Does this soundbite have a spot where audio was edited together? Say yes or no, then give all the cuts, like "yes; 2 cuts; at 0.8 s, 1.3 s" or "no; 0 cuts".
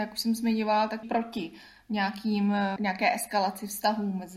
yes; 2 cuts; at 1.0 s, 2.8 s